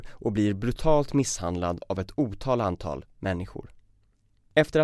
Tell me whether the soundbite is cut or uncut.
uncut